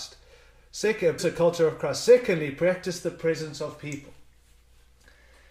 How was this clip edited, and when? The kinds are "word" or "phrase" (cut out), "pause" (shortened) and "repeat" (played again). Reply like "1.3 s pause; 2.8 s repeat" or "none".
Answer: 1.2 s word